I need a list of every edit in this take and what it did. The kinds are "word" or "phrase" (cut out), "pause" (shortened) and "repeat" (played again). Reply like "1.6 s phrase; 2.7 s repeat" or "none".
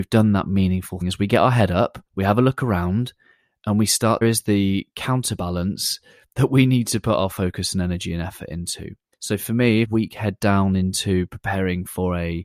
1.0 s word; 2.1 s pause; 4.2 s phrase; 9.1 s pause; 9.8 s phrase